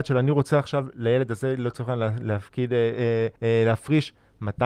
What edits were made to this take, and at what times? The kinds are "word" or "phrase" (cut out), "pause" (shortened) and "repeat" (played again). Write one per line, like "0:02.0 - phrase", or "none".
0:03.4 - pause